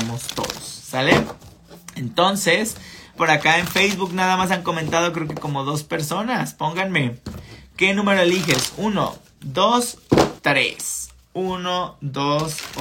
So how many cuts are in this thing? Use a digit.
2